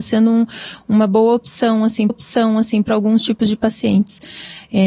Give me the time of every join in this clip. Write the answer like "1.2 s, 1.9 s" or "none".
2.1 s